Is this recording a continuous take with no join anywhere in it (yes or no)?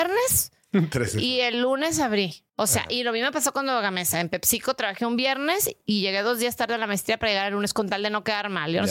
no